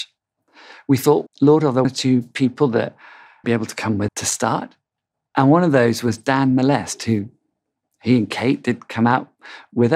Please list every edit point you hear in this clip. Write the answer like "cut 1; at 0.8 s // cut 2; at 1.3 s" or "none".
cut 1; at 1.3 s // cut 2; at 1.8 s // cut 3; at 3.4 s // cut 4; at 4.1 s